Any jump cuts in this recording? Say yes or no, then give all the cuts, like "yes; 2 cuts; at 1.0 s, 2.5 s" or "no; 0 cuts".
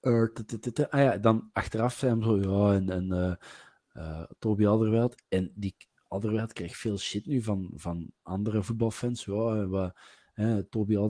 no; 0 cuts